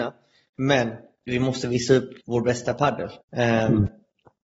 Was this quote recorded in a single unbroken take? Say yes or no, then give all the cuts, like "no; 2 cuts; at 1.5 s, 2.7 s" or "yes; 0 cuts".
no; 2 cuts; at 2.2 s, 3.2 s